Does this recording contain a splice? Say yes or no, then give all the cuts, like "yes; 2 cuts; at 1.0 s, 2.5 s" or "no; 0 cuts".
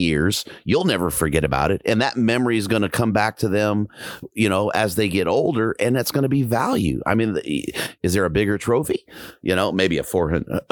no; 0 cuts